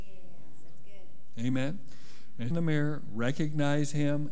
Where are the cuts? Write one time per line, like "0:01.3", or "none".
0:02.5